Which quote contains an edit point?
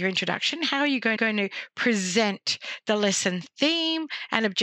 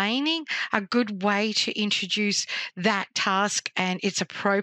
first; 1 cut; at 1.2 s

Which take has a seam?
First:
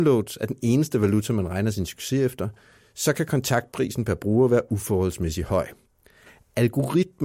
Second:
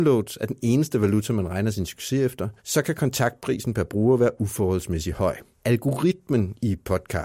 second; 2 cuts; at 2.6 s, 5.5 s

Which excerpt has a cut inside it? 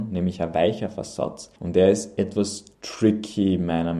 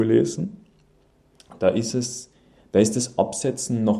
first; 2 cuts; at 1.6 s, 2.7 s

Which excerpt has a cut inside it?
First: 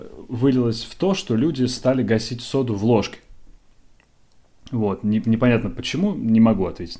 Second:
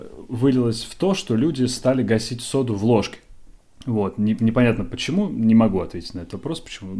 second; 1 cut; at 3.6 s

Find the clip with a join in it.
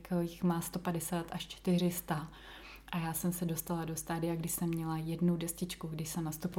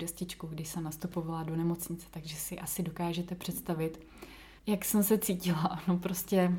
second; 1 cut; at 4.6 s

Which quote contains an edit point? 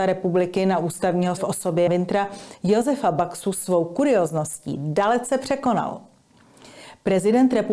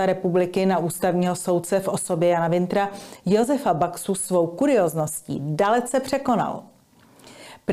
first; 2 cuts; at 1.4 s, 1.9 s

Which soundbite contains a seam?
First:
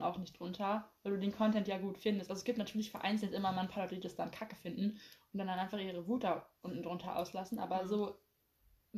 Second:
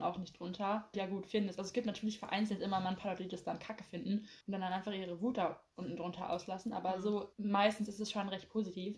second; 3 cuts; at 0.9 s, 4.4 s, 7.3 s

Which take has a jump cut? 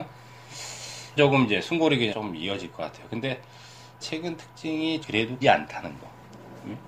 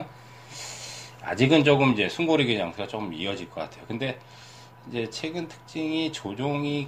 first; 5 cuts; at 1.2 s, 2.1 s, 4.0 s, 5.0 s, 5.4 s

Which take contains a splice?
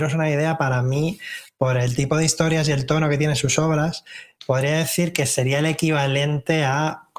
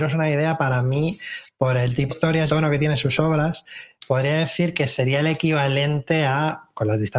second; 2 cuts; at 2.1 s, 2.5 s

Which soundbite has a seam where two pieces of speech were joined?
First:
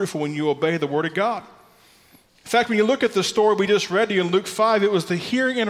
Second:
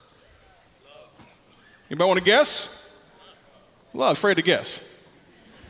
second; 1 cut; at 4.1 s

